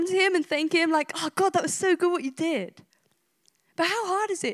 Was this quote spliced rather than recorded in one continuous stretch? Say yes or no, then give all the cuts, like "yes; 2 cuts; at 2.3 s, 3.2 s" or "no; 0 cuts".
no; 0 cuts